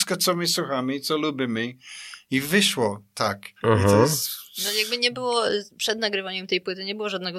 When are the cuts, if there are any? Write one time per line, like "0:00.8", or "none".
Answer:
0:03.6
0:05.7